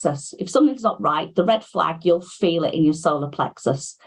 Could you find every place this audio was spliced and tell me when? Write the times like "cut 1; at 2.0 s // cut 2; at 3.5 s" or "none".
none